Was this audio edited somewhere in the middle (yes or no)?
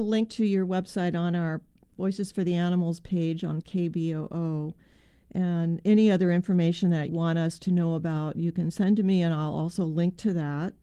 yes